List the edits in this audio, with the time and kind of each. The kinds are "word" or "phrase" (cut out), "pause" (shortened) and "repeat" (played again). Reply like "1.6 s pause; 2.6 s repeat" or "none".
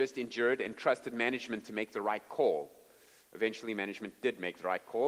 none